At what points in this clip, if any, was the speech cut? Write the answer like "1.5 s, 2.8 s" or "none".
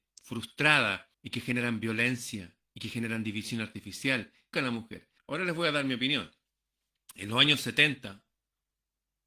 1.1 s, 4.5 s, 5.2 s